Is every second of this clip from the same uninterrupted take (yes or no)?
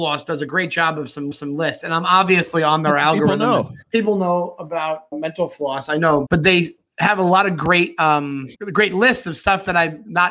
no